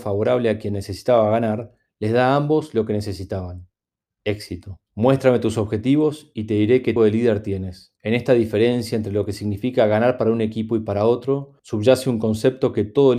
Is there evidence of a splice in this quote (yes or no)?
yes